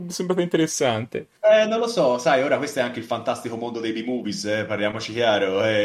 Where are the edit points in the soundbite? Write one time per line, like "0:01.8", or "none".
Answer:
0:01.4